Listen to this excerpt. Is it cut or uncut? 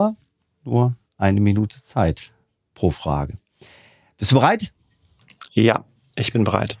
uncut